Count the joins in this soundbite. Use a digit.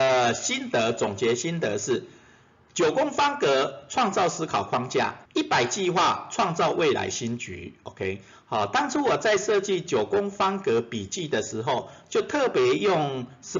1